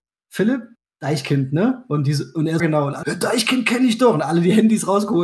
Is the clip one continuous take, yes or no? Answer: no